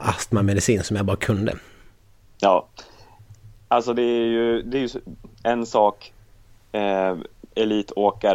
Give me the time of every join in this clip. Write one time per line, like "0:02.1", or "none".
none